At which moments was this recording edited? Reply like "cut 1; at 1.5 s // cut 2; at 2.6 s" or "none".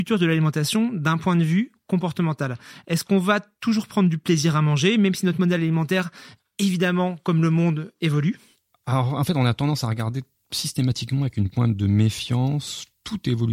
none